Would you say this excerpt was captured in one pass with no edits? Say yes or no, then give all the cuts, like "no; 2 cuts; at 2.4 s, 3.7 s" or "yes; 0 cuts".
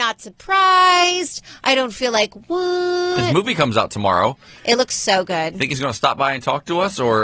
yes; 0 cuts